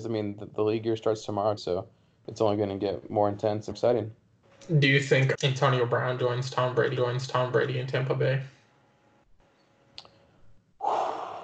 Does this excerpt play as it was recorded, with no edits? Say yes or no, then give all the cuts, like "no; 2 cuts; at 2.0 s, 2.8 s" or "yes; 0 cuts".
no; 4 cuts; at 1.6 s, 3.7 s, 5.3 s, 7.0 s